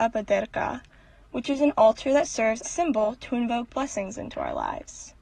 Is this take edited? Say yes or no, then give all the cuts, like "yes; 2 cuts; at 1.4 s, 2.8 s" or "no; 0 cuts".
yes; 1 cut; at 2.6 s